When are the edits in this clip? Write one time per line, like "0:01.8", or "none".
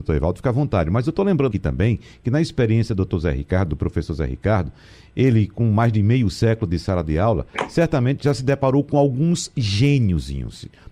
0:01.5

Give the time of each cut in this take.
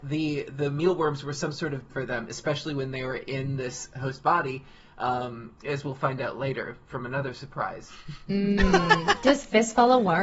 0:01.9

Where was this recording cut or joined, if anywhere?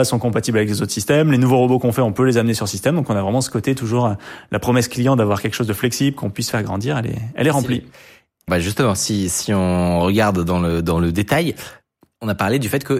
0:08.5

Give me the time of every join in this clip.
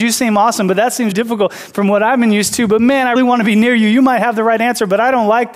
0:01.1
0:03.2

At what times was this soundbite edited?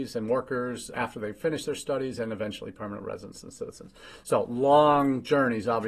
0:00.9

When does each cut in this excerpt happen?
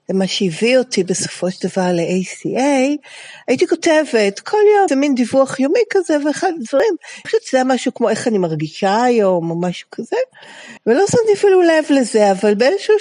0:04.9
0:07.2
0:10.8

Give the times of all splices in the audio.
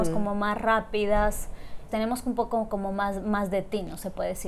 0:01.9

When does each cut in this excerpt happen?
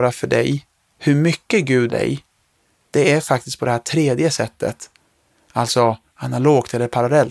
0:01.9

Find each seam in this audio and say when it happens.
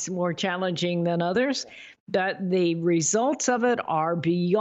none

